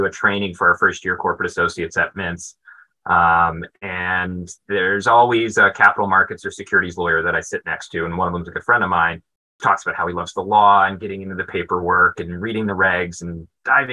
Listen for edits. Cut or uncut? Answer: cut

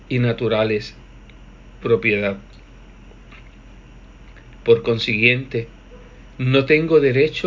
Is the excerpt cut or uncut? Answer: cut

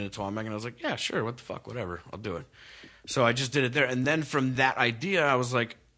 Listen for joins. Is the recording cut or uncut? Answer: uncut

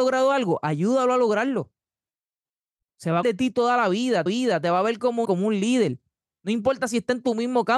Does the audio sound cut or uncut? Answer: cut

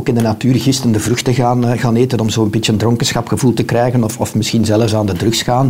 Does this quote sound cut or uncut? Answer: uncut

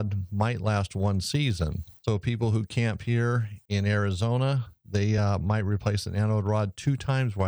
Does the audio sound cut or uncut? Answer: uncut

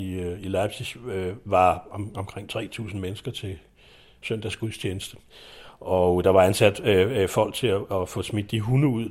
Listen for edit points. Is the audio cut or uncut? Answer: uncut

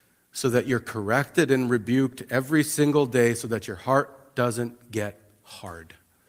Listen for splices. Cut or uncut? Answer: uncut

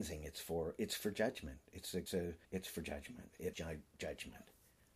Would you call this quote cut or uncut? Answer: cut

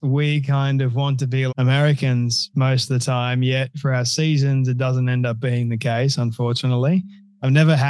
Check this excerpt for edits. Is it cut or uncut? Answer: cut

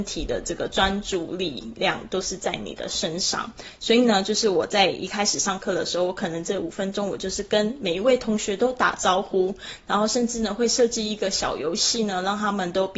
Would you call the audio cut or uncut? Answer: uncut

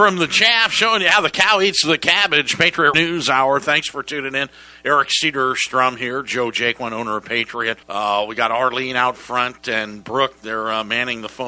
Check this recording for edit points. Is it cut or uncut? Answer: cut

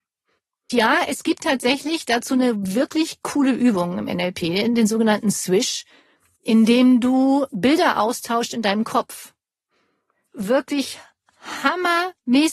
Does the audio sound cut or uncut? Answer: cut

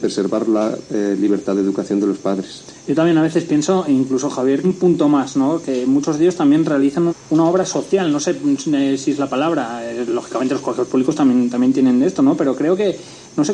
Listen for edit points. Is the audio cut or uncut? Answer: cut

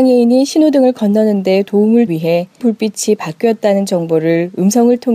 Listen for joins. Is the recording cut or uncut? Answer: cut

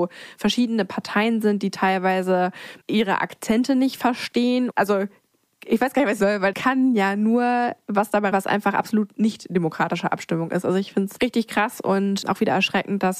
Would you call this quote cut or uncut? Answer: cut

